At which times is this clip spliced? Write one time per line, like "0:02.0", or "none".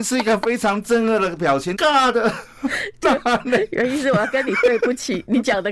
0:01.7